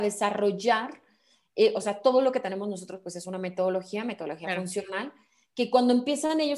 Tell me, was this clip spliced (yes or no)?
no